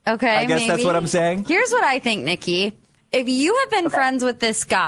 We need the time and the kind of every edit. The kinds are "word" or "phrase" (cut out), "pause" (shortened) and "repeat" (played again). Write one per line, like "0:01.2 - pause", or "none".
none